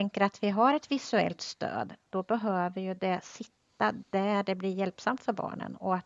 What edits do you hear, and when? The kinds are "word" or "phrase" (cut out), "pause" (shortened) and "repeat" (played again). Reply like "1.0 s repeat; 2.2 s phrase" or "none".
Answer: none